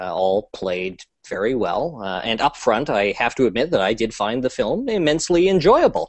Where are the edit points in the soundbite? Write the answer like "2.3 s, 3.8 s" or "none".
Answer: none